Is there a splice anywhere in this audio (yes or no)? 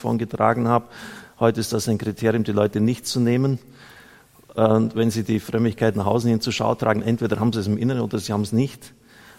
no